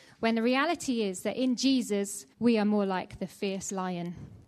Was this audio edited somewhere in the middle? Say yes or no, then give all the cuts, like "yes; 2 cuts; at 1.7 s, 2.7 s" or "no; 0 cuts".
yes; 1 cut; at 2.3 s